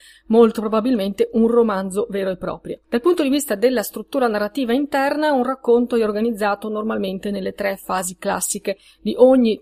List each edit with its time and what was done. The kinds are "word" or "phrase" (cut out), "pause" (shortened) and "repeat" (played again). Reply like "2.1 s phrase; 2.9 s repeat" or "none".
2.8 s pause